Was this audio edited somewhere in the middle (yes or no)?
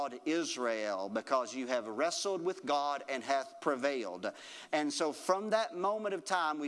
no